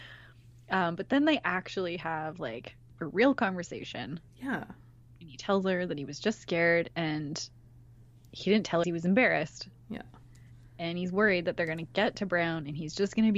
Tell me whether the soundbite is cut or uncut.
cut